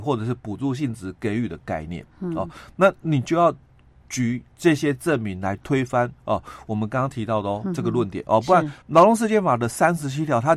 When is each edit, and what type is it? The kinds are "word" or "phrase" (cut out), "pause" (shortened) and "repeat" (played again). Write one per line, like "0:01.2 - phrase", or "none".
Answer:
0:04.5 - pause
0:06.2 - pause
0:08.8 - pause